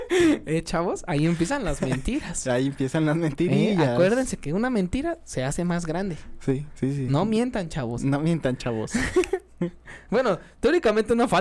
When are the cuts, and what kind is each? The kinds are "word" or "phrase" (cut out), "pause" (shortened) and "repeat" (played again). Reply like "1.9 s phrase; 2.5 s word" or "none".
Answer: none